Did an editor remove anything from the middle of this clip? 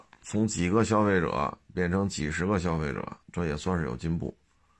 yes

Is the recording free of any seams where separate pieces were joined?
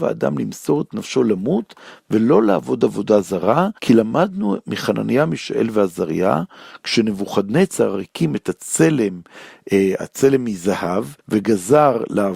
no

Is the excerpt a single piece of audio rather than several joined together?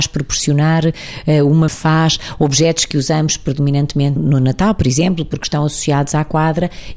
no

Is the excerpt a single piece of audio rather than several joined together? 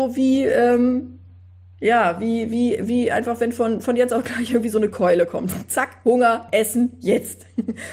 yes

